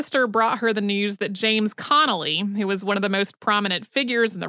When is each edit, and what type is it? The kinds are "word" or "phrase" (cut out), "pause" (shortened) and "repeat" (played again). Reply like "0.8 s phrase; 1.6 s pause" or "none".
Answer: none